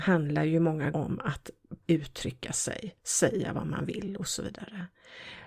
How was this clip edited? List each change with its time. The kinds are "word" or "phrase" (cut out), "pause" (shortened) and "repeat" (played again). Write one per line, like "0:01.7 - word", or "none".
0:00.9 - word
0:01.8 - word